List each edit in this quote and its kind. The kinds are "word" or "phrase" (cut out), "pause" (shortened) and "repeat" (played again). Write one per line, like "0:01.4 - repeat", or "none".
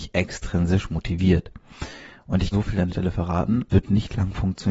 0:02.5 - word
0:02.9 - word
0:03.7 - word